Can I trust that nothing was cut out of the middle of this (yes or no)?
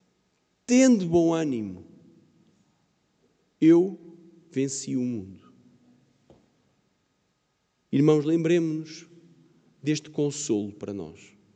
yes